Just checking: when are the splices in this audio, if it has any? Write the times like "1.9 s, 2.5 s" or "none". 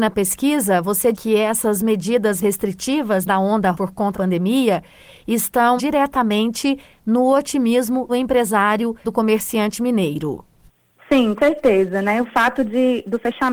1.1 s, 2.4 s, 3.3 s, 3.7 s, 4.1 s, 5.8 s, 8.1 s, 9.0 s, 11.4 s